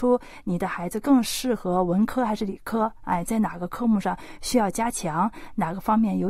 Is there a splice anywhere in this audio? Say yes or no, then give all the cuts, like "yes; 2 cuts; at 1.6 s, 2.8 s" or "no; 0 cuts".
no; 0 cuts